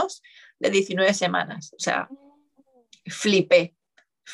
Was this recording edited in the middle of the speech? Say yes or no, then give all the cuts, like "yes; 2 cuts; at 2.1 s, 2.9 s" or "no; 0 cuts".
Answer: no; 0 cuts